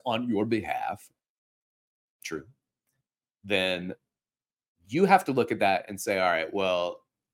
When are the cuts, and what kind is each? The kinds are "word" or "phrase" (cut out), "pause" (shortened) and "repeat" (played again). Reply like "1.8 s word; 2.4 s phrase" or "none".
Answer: none